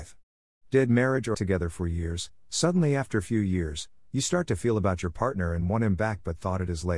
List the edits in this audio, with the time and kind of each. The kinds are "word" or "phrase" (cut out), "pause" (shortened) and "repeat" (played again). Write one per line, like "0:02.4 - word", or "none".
0:01.3 - word